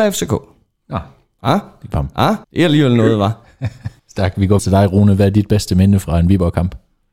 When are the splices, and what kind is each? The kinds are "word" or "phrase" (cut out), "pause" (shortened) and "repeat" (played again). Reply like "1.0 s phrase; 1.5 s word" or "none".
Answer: 1.9 s word; 2.4 s pause; 4.0 s pause; 4.6 s word